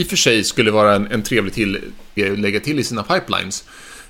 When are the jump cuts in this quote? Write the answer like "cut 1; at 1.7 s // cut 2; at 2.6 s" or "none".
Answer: cut 1; at 2.2 s